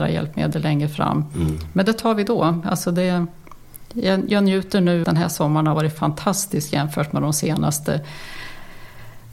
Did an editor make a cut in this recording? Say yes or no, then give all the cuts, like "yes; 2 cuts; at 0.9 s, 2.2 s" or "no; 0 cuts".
yes; 1 cut; at 5.0 s